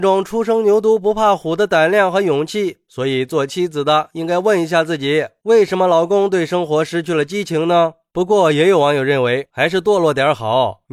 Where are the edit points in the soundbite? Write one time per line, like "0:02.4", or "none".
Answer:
0:09.5